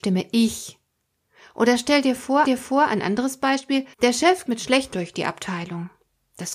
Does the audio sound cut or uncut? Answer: cut